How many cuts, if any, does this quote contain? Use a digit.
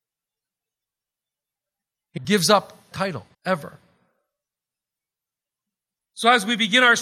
3